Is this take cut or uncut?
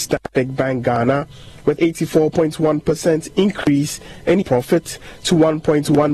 cut